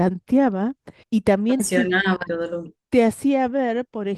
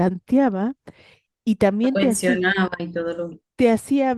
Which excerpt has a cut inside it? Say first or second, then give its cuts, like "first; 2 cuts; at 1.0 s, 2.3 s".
first; 3 cuts; at 1.0 s, 1.6 s, 2.3 s